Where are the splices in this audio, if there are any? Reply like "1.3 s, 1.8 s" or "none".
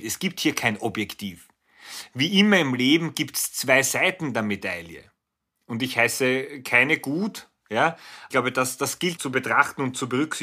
8.3 s, 9.2 s

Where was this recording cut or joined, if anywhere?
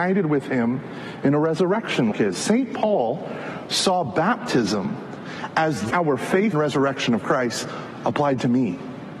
2.1 s, 5.9 s, 6.5 s

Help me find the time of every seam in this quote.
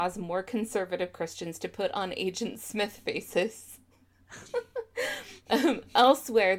none

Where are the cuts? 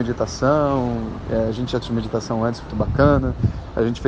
1.8 s, 2.7 s

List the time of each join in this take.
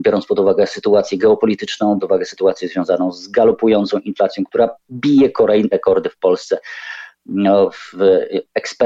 2.0 s, 5.7 s

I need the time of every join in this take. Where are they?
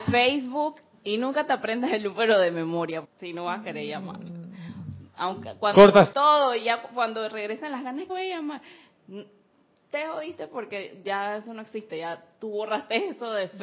3.0 s, 6.1 s, 8.1 s

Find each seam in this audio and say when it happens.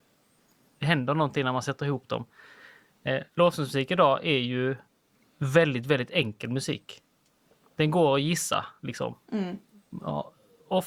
none

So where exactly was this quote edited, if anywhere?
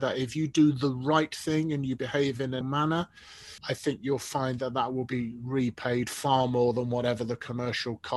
2.6 s, 3.6 s

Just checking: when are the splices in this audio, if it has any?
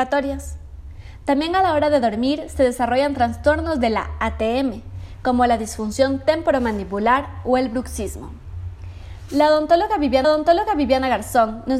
10.2 s

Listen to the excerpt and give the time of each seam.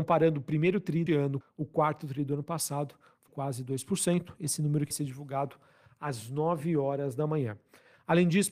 1.1 s, 1.4 s, 3.3 s, 4.9 s

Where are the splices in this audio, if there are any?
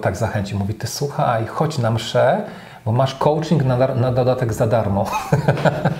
none

